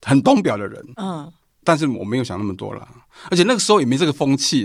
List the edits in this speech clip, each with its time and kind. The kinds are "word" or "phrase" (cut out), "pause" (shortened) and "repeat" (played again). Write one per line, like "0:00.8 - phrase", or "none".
none